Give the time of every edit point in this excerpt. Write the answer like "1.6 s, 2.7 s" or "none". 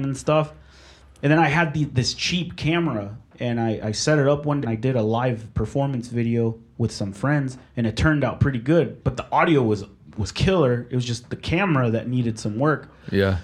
4.6 s, 7.6 s